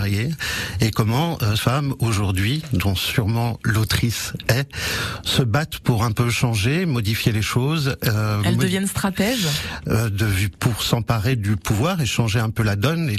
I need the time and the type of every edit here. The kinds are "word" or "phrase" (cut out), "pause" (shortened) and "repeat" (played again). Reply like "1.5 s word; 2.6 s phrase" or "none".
1.6 s word